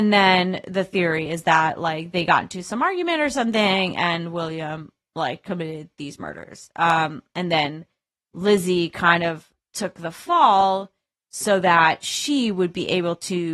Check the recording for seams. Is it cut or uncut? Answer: uncut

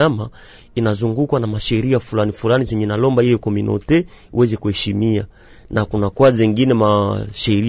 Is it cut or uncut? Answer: uncut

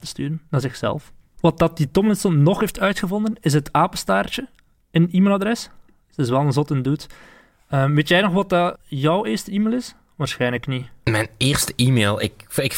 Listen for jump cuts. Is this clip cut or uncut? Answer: cut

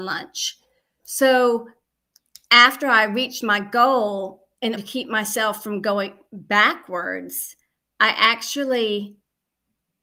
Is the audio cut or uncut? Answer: cut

